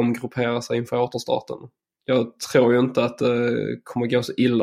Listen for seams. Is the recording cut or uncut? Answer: uncut